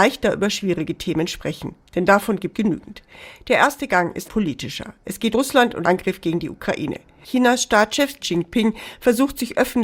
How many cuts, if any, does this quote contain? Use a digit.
5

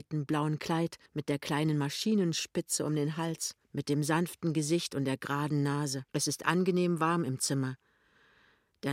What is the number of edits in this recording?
3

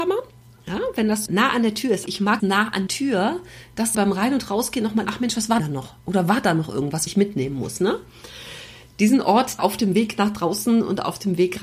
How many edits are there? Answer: 9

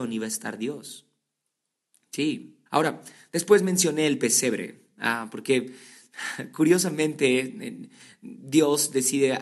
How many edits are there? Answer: 1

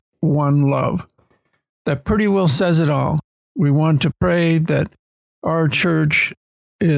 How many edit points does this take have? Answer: 0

